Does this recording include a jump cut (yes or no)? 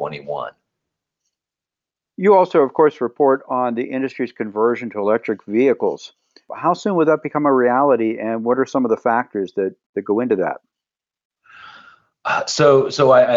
no